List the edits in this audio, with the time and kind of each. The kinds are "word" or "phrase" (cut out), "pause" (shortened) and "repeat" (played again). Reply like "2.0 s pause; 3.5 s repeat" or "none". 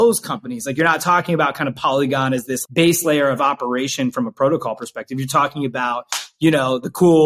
2.6 s word